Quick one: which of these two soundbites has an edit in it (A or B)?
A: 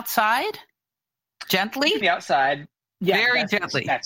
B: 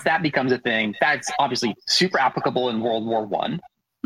A